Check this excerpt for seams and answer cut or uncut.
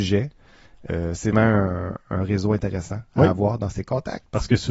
cut